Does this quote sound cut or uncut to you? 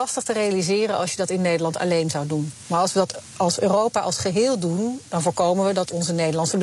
uncut